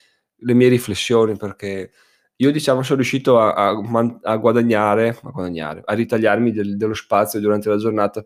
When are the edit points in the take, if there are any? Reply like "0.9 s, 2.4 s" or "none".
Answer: none